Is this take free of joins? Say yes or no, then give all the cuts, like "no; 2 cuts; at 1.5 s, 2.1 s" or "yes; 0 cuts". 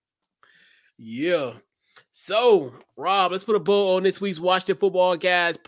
yes; 0 cuts